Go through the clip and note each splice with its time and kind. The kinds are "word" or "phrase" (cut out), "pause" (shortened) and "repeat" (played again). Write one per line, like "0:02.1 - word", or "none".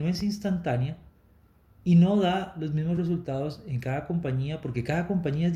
none